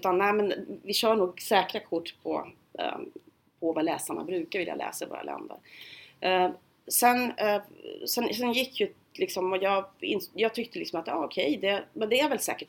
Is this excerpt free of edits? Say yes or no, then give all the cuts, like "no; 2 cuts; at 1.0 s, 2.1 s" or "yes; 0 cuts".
yes; 0 cuts